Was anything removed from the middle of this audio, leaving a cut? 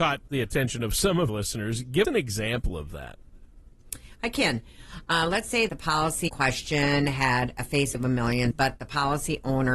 yes; 6 cuts; at 1.3 s, 2.0 s, 5.7 s, 6.3 s, 7.9 s, 8.5 s

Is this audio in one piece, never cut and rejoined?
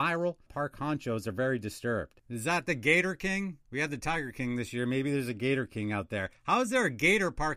no; 1 cut; at 3.6 s

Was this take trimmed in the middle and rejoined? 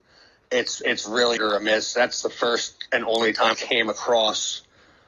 yes; 2 cuts; at 1.4 s, 3.5 s

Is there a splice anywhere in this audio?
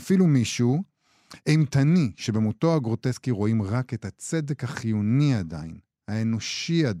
no; 0 cuts

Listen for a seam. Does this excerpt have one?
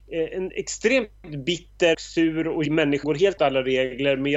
yes; 4 cuts; at 1.9 s, 2.7 s, 3.0 s, 3.4 s

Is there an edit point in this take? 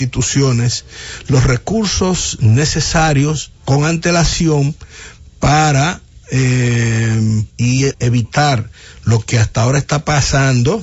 yes; 3 cuts; at 3.6 s, 7.5 s, 7.9 s

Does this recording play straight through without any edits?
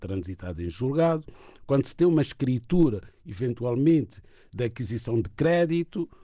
yes; 0 cuts

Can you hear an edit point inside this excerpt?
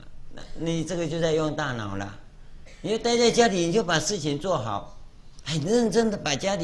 no; 0 cuts

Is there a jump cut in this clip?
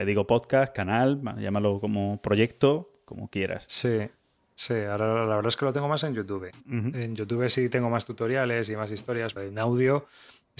yes; 1 cut; at 9.4 s

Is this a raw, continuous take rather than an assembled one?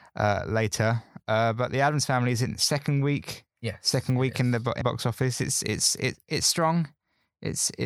no; 2 cuts; at 3.5 s, 4.8 s

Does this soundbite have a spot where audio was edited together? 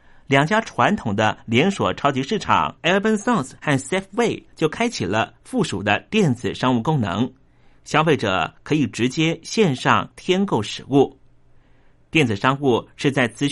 yes; 2 cuts; at 2.8 s, 3.6 s

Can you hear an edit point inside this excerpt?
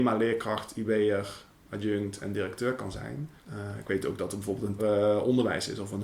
yes; 2 cuts; at 3.4 s, 4.8 s

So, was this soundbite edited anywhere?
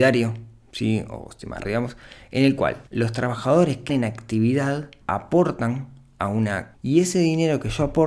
yes; 5 cuts; at 1.6 s, 2.9 s, 3.9 s, 5.0 s, 6.7 s

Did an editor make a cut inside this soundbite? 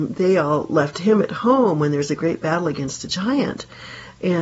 no; 0 cuts

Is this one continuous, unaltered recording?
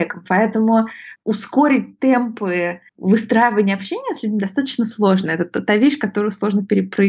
no; 1 cut; at 2.9 s

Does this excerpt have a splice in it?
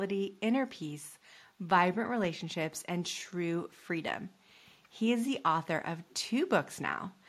no; 0 cuts

